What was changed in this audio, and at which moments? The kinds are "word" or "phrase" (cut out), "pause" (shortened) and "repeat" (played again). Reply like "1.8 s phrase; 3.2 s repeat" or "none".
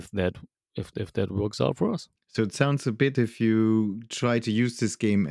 0.9 s word; 2.2 s pause; 3.1 s word

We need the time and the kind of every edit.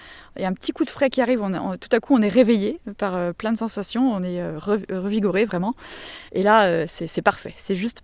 6.3 s pause

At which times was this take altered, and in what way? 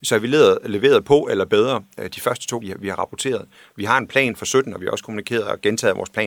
2.6 s word

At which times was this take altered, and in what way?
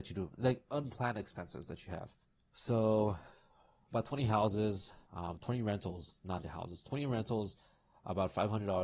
2.2 s pause; 5.1 s pause

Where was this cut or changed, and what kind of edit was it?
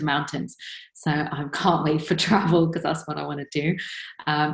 none

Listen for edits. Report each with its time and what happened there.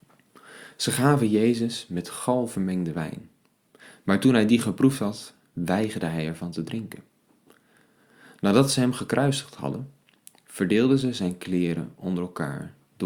none

